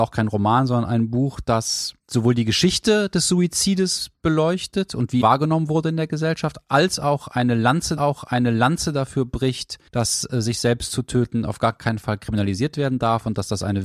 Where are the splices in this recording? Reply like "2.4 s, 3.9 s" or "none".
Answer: 2.0 s, 5.2 s, 8.0 s, 9.9 s